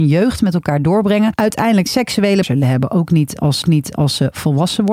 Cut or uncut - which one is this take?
cut